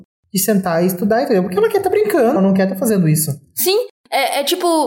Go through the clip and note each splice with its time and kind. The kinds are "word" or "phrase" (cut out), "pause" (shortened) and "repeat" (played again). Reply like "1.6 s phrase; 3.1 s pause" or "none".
2.4 s word